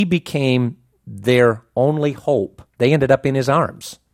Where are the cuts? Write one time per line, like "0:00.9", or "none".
0:02.7